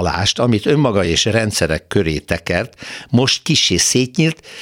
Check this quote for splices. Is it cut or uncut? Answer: uncut